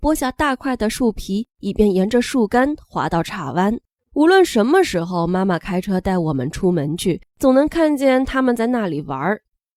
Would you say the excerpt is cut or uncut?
cut